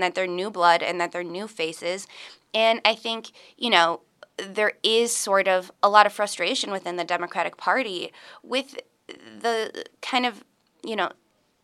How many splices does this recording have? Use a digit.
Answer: 1